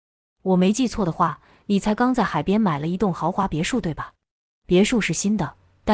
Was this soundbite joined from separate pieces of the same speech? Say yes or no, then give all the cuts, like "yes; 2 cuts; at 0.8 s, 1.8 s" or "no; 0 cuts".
no; 0 cuts